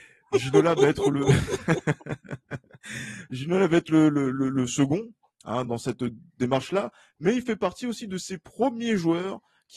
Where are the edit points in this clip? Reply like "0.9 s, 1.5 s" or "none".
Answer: 5.7 s

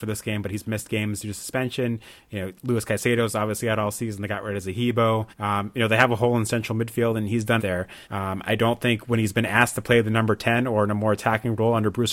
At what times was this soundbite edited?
5.3 s, 7.6 s, 8.0 s

